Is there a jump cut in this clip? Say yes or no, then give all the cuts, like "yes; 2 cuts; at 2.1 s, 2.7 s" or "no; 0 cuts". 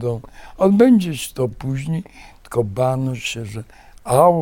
no; 0 cuts